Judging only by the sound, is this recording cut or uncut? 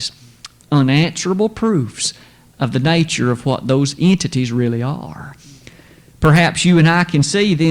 uncut